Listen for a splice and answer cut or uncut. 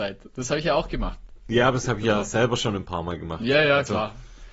uncut